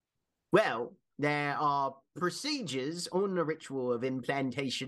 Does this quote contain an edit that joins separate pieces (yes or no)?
no